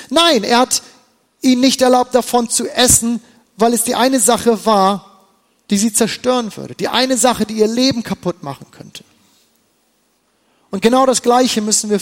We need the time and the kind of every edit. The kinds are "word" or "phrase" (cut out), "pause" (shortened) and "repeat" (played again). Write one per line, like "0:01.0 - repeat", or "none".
none